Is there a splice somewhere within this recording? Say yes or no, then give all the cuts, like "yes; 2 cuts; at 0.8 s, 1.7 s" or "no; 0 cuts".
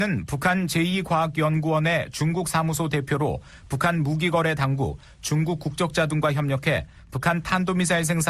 no; 0 cuts